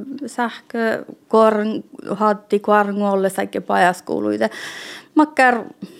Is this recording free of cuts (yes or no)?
yes